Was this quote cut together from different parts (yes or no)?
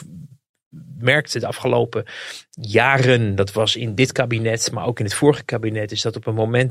no